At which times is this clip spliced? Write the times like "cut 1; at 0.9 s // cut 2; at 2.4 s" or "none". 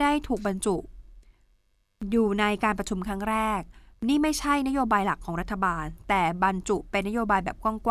cut 1; at 3.9 s